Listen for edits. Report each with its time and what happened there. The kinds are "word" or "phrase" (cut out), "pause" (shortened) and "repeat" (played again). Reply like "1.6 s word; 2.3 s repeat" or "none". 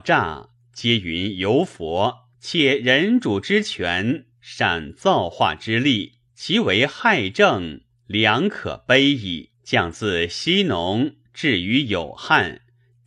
2.3 s pause; 6.3 s pause; 9.5 s pause